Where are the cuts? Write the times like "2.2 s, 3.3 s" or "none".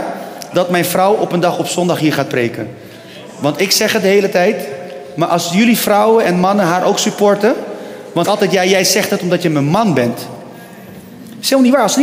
8.2 s